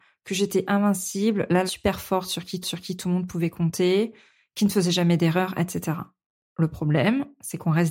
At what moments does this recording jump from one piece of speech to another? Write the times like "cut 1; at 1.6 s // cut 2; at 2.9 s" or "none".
cut 1; at 1.7 s // cut 2; at 2.6 s